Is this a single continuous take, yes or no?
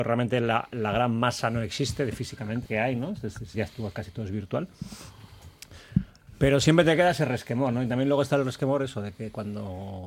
no